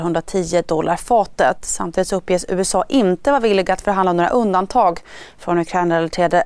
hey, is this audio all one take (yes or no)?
yes